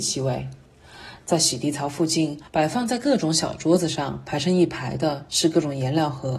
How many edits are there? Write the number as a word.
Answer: one